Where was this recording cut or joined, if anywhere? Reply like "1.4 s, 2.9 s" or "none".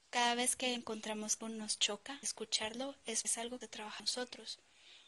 1.4 s, 2.2 s, 3.2 s, 3.6 s, 4.0 s